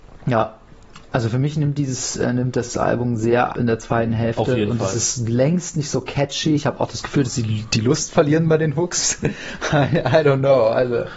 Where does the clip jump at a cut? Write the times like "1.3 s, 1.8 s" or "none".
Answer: 3.5 s

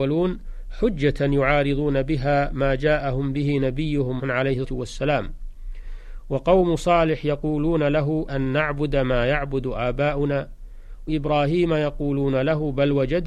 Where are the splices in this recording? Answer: 4.2 s, 4.6 s, 8.3 s, 11.1 s

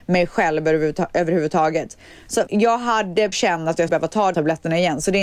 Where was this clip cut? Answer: 2.5 s, 3.3 s, 3.9 s, 4.3 s

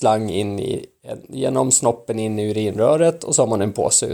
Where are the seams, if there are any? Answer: none

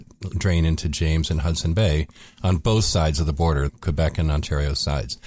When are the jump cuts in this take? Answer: 3.7 s

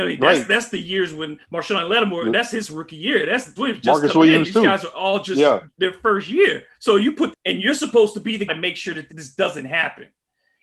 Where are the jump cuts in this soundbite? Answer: 1.4 s, 3.6 s, 5.7 s, 6.7 s, 7.3 s, 8.5 s, 9.1 s

